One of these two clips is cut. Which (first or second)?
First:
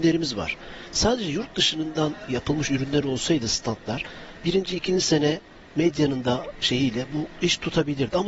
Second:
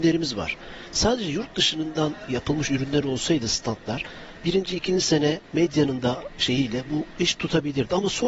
second